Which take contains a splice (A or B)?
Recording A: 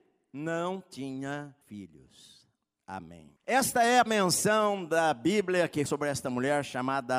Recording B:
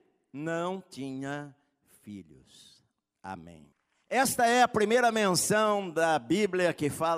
A